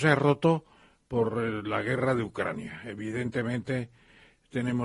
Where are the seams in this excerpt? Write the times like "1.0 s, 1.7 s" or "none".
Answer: none